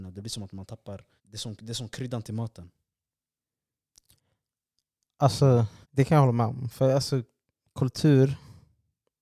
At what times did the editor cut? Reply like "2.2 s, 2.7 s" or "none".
1.2 s, 5.8 s